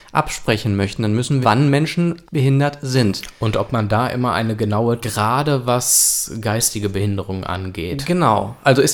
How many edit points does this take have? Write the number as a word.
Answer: three